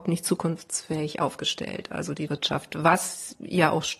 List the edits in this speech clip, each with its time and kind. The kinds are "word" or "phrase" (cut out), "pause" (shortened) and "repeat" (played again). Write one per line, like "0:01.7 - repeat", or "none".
0:02.3 - word